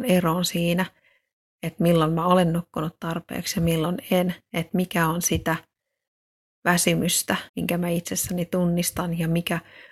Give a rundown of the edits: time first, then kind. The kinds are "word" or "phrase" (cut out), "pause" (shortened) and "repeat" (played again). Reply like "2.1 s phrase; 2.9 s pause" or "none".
7.5 s pause